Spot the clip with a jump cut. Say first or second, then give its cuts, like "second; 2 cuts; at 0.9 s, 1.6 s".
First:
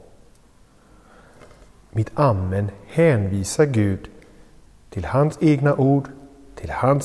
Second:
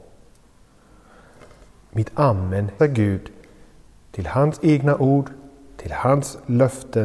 second; 1 cut; at 2.8 s